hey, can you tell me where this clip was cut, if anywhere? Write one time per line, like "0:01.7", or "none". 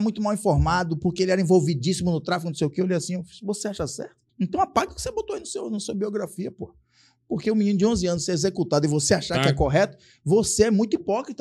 0:04.3